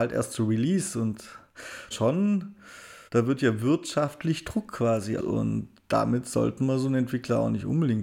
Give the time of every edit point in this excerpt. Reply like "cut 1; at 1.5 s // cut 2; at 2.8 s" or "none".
cut 1; at 1.9 s // cut 2; at 3.1 s // cut 3; at 5.2 s